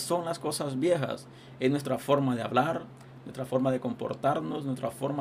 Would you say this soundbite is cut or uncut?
uncut